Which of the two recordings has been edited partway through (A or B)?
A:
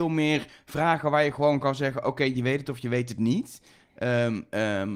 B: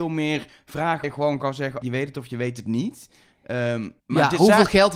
B